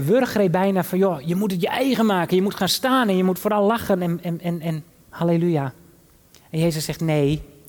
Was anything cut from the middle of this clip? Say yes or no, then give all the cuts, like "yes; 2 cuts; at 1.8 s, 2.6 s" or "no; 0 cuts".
no; 0 cuts